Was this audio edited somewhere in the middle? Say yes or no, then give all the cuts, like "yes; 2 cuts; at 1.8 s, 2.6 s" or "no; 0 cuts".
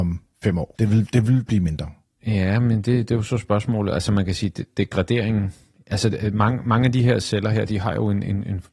no; 0 cuts